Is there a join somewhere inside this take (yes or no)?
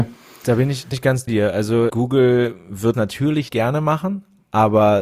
yes